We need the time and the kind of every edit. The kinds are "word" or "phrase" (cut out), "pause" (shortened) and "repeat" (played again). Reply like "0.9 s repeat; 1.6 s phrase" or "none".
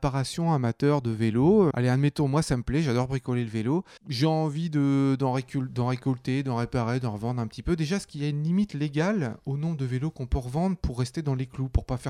1.7 s word